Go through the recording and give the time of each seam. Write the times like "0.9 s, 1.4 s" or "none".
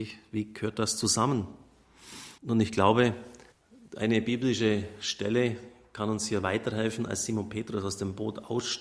2.4 s, 3.5 s